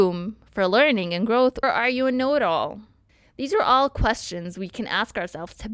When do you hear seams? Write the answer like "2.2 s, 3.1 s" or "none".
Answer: 1.6 s, 3.1 s